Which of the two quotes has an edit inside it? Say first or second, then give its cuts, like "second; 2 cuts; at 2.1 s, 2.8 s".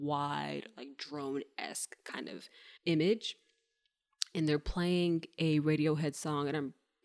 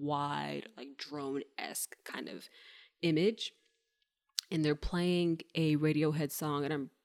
first; 1 cut; at 2.8 s